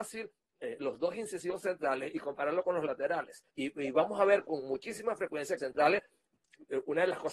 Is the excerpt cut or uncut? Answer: cut